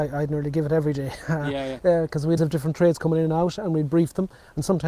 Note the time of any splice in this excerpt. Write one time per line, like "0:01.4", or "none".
0:02.4